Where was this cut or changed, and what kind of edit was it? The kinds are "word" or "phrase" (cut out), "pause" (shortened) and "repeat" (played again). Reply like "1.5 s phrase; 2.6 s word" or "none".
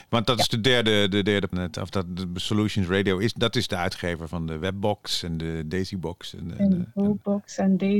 1.5 s phrase